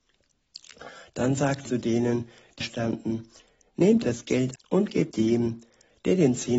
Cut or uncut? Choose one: cut